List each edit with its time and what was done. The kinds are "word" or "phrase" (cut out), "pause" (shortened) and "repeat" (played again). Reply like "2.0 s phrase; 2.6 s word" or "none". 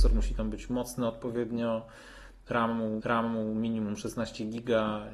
3.0 s repeat

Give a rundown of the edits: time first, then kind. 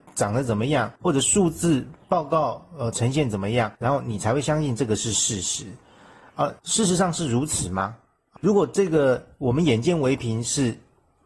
1.0 s pause; 3.8 s pause; 6.6 s pause; 8.4 s word

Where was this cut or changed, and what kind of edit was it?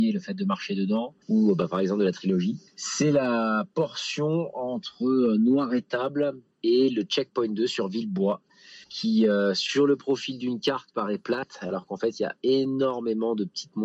1.2 s pause; 2.7 s pause; 8.8 s pause

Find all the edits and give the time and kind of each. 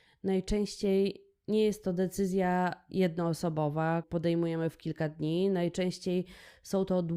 4.0 s word

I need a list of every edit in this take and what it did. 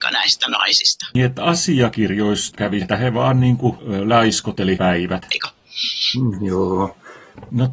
2.8 s word; 4.8 s word

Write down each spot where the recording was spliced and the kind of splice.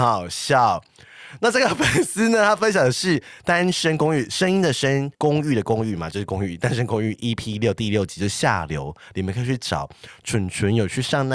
5.1 s pause

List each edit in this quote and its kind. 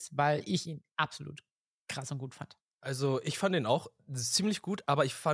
2.7 s pause

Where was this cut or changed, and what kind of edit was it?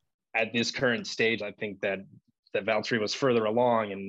1.4 s phrase

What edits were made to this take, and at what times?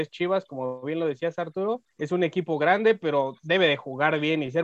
1.9 s pause

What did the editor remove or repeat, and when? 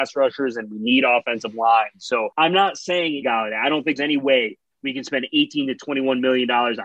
2.3 s pause; 3.2 s phrase; 4.0 s word

